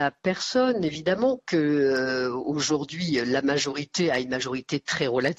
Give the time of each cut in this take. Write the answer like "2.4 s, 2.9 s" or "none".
none

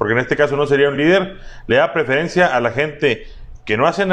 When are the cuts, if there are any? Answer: none

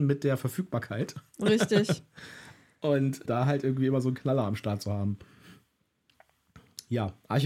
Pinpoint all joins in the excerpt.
3.3 s

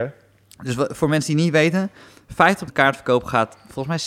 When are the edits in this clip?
2.7 s

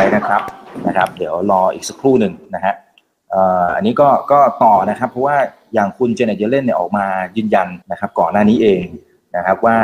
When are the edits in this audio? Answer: 7.8 s

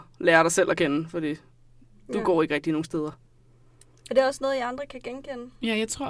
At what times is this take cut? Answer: none

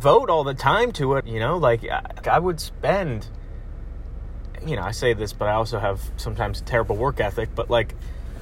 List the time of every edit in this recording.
1.2 s, 2.2 s

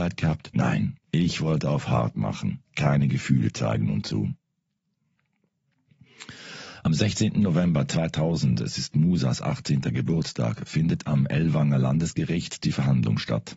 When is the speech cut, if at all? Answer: 1.0 s, 2.7 s

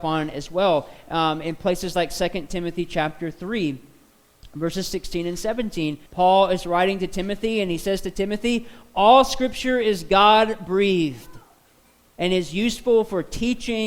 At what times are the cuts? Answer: 6.1 s

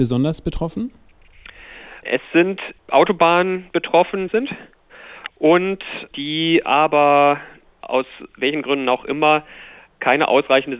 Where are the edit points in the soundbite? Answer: 2.8 s, 4.3 s

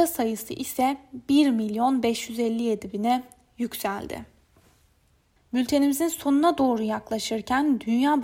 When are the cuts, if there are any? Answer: none

